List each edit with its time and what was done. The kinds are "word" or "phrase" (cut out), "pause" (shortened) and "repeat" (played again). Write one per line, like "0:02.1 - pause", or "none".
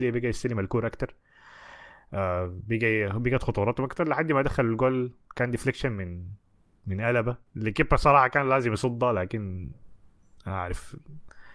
0:07.5 - pause